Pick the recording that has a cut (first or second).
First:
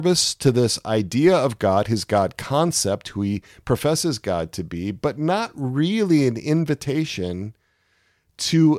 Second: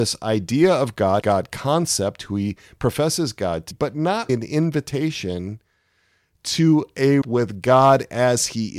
second